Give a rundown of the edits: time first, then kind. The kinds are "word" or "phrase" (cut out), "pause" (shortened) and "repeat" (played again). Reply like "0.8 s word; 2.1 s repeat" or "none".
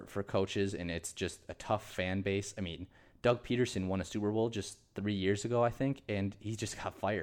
none